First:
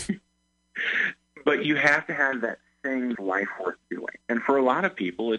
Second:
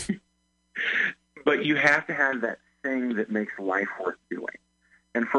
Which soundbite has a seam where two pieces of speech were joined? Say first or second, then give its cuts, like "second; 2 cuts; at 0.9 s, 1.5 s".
first; 2 cuts; at 3.1 s, 4.2 s